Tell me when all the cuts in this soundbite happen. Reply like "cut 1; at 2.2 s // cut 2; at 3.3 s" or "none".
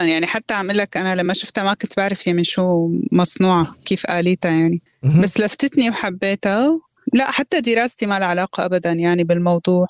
none